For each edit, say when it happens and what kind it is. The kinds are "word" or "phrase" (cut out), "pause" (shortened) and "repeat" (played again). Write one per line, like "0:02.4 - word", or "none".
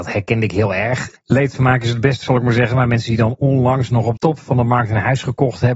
0:01.2 - pause
0:02.2 - word
0:04.2 - word

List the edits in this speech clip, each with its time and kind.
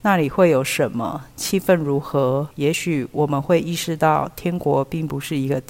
0:02.5 - pause

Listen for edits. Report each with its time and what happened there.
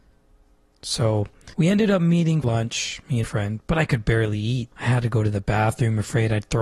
0:01.5 - pause
0:02.4 - word
0:03.2 - word
0:04.7 - pause

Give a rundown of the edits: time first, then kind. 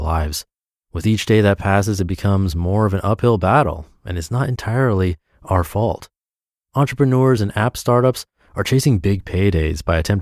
none

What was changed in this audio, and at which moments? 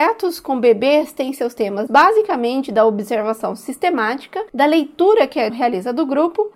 0:01.9 - word
0:05.5 - word

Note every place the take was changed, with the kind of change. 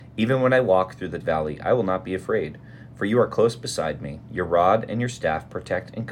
0:01.2 - word

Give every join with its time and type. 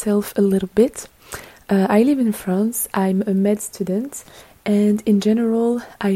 none

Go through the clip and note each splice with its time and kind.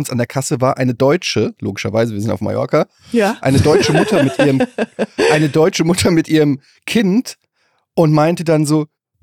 none

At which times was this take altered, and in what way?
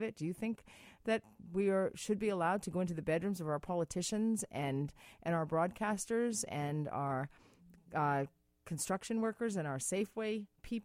none

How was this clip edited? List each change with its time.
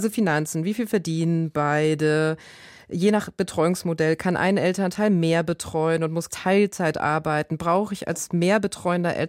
0:06.3 - word

